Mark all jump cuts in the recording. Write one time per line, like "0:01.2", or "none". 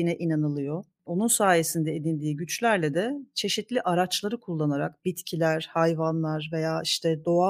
none